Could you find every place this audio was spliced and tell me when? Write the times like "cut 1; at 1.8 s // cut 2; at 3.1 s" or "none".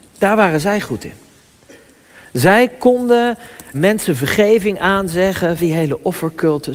cut 1; at 3.7 s // cut 2; at 5.6 s